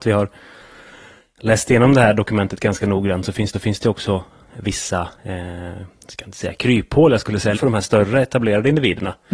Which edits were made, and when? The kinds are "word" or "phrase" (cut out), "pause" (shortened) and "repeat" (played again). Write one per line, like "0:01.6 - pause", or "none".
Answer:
0:03.5 - repeat
0:05.2 - pause
0:07.5 - word